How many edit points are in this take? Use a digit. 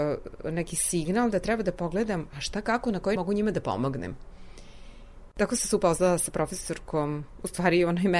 1